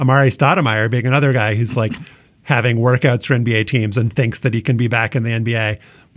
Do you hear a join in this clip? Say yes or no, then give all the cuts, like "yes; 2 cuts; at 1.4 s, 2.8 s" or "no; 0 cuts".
no; 0 cuts